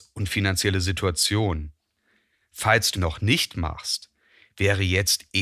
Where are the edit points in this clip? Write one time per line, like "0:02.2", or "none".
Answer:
0:02.9